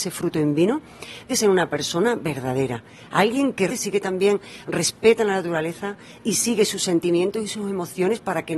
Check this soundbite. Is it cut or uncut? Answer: cut